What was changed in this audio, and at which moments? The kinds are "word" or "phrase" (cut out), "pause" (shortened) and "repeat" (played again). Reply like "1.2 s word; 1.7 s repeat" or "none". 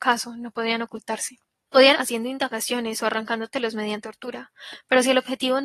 1.9 s word; 4.0 s word